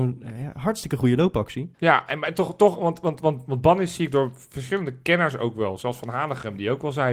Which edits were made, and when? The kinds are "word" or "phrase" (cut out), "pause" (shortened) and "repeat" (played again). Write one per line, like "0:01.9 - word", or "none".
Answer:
0:01.7 - pause